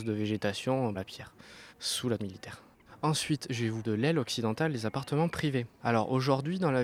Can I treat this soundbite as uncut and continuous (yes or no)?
no